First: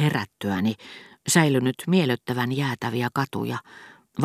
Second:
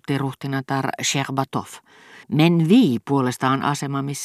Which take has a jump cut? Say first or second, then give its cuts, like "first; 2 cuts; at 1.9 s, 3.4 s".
second; 1 cut; at 2.2 s